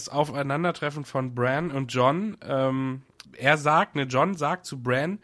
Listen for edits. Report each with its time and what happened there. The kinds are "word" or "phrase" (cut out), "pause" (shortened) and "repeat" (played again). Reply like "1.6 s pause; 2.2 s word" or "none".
3.3 s pause

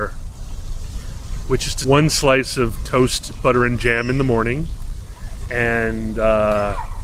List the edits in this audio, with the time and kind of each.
1.8 s word

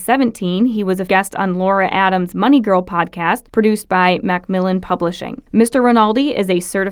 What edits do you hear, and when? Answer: 1.1 s word; 3.5 s pause; 5.5 s pause

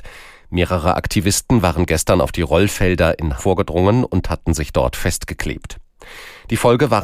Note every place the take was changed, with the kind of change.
3.4 s phrase

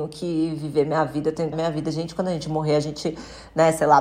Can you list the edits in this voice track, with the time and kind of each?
1.5 s phrase

